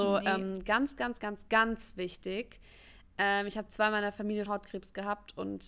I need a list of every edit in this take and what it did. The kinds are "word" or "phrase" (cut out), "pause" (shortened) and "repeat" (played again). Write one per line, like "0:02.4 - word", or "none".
0:01.2 - word
0:04.5 - word